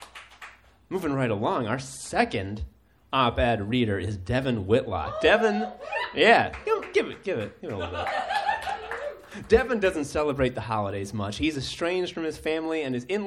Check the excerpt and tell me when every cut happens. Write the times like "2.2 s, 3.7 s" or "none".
none